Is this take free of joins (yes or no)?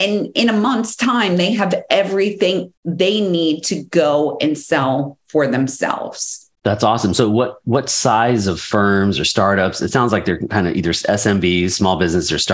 no